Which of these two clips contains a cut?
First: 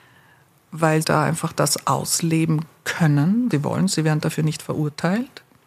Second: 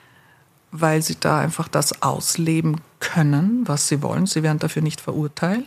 first; 2 cuts; at 1.0 s, 3.5 s

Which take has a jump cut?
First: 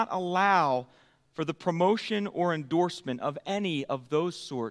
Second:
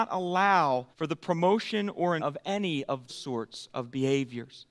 second; 3 cuts; at 0.9 s, 2.2 s, 3.1 s

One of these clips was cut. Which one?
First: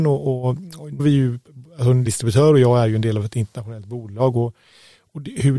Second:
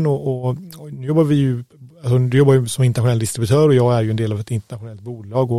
first; 2 cuts; at 1.0 s, 2.1 s

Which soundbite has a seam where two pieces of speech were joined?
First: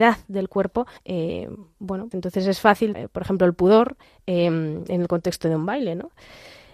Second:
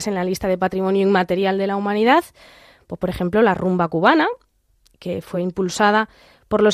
first; 4 cuts; at 1.0 s, 2.1 s, 2.9 s, 4.0 s

